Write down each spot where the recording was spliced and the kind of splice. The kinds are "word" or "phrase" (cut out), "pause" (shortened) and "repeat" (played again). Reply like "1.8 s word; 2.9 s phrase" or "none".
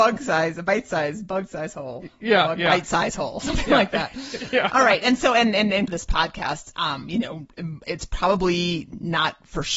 5.9 s phrase